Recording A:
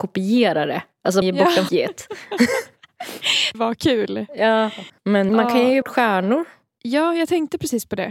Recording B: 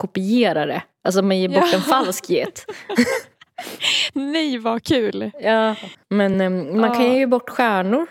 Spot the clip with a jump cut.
A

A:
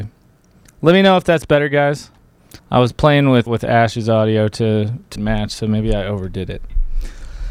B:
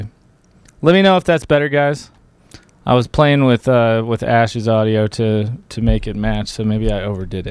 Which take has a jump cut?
A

